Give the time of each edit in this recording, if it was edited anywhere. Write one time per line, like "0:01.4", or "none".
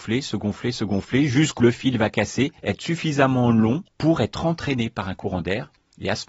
0:01.6
0:02.6
0:03.9